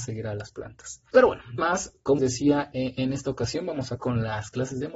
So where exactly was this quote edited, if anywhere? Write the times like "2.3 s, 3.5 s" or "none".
1.6 s, 2.2 s, 4.0 s